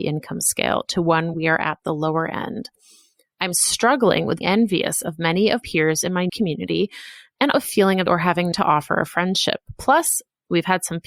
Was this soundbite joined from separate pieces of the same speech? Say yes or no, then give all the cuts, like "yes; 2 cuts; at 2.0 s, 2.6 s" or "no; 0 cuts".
yes; 7 cuts; at 1.3 s, 4.4 s, 5.6 s, 6.3 s, 7.5 s, 8.1 s, 8.5 s